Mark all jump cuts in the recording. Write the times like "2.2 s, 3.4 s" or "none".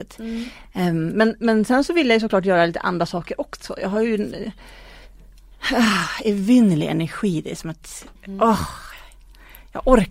none